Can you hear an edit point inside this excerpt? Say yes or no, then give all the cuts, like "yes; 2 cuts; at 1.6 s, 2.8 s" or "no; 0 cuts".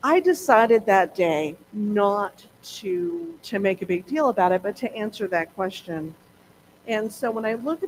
yes; 2 cuts; at 1.6 s, 3.4 s